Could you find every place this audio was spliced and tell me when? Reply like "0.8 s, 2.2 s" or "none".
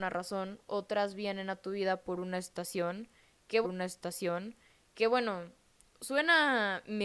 3.6 s

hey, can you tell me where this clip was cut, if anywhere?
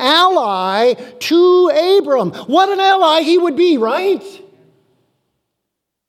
none

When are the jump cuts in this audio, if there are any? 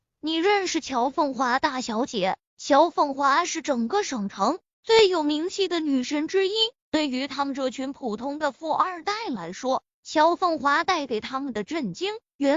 2.5 s

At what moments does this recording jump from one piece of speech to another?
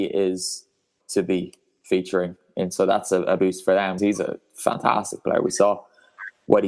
1.0 s, 2.7 s, 3.4 s, 4.0 s

